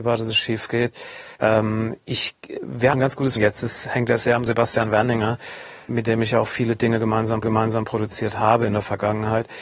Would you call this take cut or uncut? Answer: cut